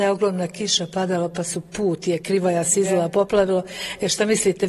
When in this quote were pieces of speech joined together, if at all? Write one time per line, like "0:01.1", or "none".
none